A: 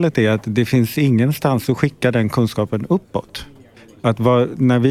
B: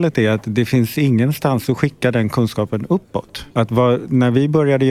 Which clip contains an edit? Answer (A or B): B